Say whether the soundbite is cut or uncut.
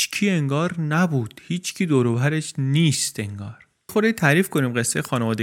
cut